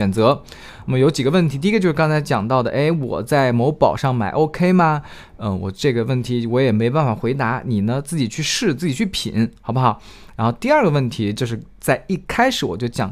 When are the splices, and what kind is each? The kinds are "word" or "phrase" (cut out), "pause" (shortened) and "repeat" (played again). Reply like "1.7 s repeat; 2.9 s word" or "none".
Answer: none

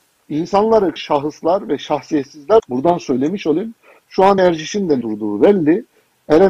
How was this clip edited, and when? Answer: 1.0 s word; 2.6 s word; 4.4 s word; 5.0 s word

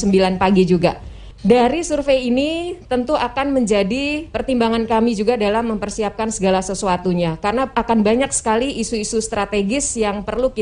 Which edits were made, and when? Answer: none

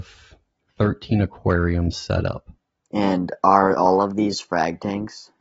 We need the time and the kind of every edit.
none

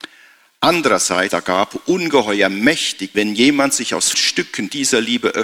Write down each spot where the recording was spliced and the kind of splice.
1.3 s word; 3.1 s word; 4.1 s word

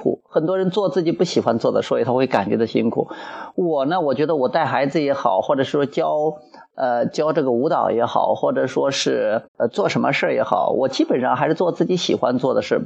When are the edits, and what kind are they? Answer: 9.5 s pause

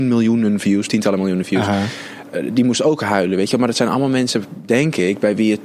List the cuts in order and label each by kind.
none

